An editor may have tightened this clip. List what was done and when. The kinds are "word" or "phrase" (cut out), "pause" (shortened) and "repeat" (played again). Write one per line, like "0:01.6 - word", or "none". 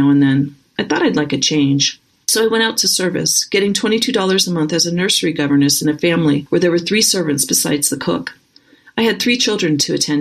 none